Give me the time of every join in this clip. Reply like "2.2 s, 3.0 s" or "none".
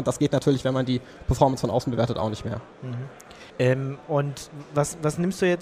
3.5 s